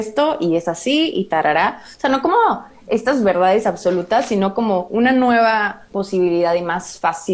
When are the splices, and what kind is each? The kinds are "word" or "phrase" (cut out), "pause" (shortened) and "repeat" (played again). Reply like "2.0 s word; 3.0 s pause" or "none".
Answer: 5.9 s pause